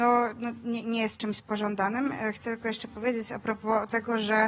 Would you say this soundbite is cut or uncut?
uncut